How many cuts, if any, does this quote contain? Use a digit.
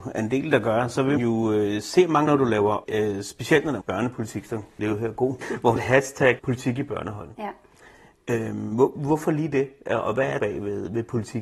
9